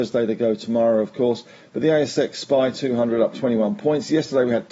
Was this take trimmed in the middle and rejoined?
no; 0 cuts

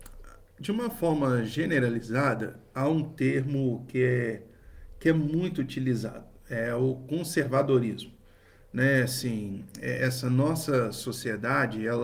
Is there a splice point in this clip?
no; 0 cuts

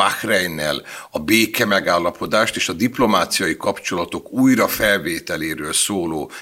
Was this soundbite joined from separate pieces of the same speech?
no; 0 cuts

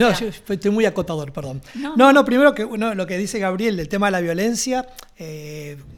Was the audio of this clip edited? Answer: no; 0 cuts

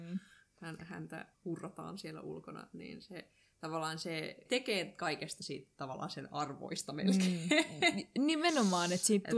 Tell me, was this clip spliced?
no; 0 cuts

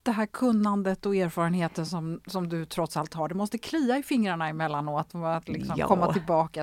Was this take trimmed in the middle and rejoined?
no; 0 cuts

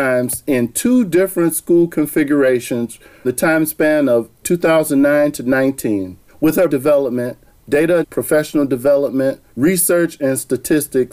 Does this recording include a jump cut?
yes; 6 cuts; at 3.2 s, 4.4 s, 6.3 s, 6.7 s, 8.0 s, 9.5 s

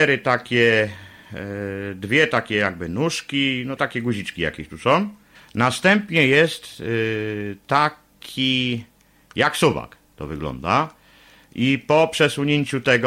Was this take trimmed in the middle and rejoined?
yes; 2 cuts; at 3.8 s, 5.3 s

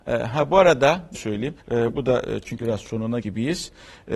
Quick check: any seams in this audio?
yes; 4 cuts; at 1.1 s, 1.6 s, 2.6 s, 3.2 s

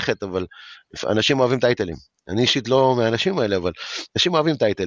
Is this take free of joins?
yes; 0 cuts

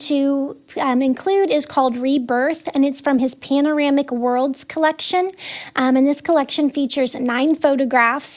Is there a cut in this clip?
no; 0 cuts

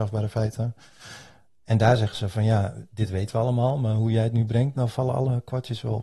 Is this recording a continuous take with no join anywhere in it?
yes; 0 cuts

